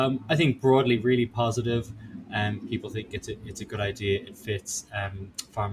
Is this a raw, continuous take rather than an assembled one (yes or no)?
yes